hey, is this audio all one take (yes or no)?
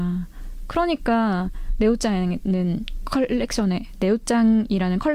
yes